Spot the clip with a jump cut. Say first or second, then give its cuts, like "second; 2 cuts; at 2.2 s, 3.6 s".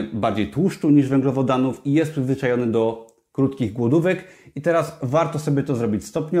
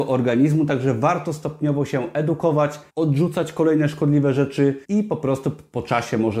second; 2 cuts; at 2.9 s, 4.8 s